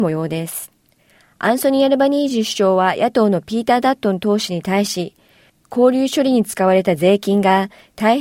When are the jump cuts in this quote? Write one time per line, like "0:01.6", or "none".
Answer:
0:01.0